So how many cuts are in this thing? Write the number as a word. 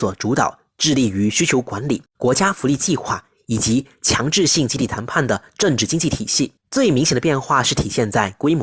two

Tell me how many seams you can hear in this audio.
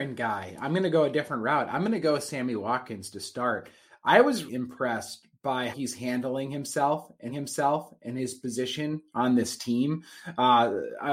three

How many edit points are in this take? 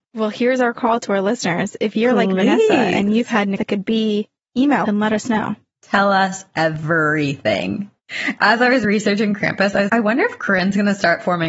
four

